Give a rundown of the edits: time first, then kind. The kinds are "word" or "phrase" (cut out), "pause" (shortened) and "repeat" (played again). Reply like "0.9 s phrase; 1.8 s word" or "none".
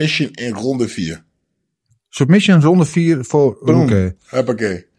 none